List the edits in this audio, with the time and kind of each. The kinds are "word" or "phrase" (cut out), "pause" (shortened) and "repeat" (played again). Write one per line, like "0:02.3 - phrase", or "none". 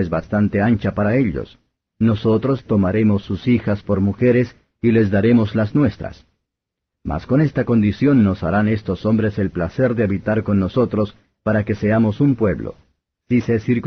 none